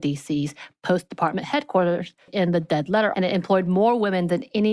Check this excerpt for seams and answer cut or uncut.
cut